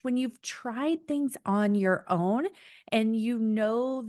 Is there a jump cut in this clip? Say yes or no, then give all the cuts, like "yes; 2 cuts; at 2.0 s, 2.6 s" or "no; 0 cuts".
no; 0 cuts